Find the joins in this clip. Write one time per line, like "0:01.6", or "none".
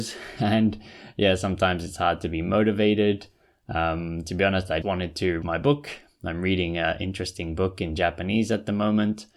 0:04.8
0:05.4